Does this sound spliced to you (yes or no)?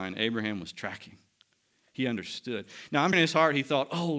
yes